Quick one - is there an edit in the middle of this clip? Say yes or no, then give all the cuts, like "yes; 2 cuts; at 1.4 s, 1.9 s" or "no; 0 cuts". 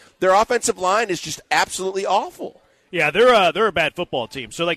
no; 0 cuts